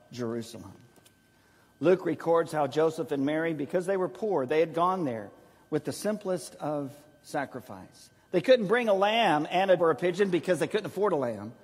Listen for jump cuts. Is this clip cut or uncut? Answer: cut